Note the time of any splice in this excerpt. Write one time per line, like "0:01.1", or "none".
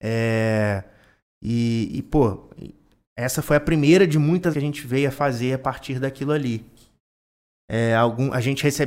0:04.5